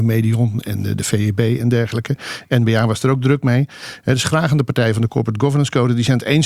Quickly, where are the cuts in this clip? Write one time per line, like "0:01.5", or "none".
none